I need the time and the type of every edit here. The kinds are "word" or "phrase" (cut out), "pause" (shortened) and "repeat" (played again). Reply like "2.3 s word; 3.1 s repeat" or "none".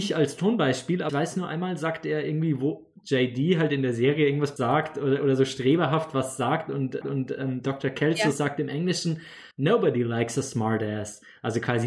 1.1 s word; 4.6 s word; 7.0 s repeat; 9.5 s pause

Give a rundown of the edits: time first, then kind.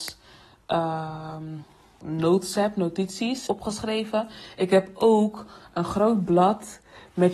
2.0 s word; 3.5 s word

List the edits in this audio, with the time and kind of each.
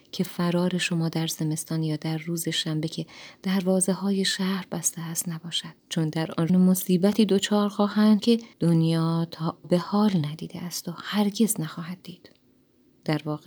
5.8 s pause; 6.5 s phrase; 8.2 s word; 8.5 s pause; 9.6 s phrase

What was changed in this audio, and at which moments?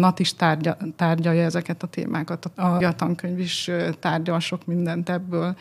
2.8 s word

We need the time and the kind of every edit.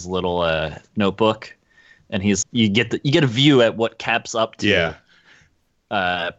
2.4 s word

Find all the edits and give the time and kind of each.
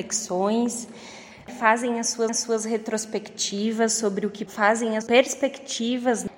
2.3 s repeat; 4.5 s word; 5.0 s word

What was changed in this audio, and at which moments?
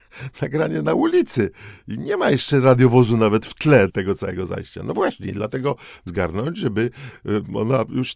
3.9 s word; 6.1 s phrase

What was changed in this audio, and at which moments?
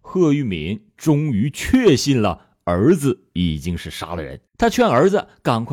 4.5 s pause

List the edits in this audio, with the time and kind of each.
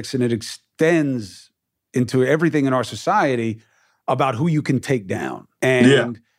none

